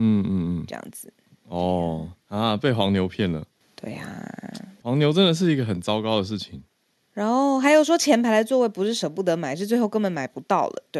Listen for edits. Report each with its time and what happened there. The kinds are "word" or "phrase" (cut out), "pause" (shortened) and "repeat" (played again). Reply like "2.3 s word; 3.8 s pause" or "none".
none